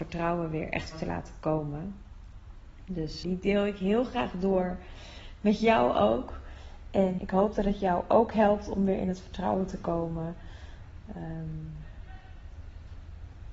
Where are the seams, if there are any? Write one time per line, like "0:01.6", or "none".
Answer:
0:00.9
0:03.2
0:07.2